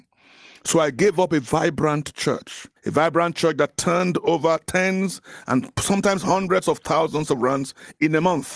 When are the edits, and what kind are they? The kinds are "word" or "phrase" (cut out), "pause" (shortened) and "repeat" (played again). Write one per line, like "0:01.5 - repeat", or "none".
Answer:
0:02.8 - pause